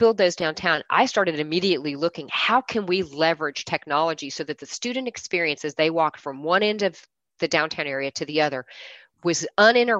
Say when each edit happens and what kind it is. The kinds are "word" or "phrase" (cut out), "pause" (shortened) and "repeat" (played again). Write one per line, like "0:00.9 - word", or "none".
none